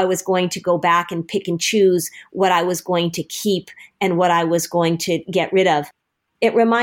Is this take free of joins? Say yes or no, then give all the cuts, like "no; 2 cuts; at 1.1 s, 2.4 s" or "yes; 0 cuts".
yes; 0 cuts